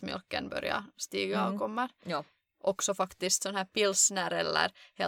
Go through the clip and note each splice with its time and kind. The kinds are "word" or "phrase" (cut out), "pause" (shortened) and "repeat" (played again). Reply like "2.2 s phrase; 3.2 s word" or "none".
none